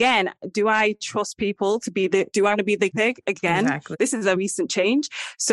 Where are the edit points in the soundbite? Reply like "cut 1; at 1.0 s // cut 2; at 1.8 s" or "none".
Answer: cut 1; at 2.3 s // cut 2; at 2.9 s // cut 3; at 4.4 s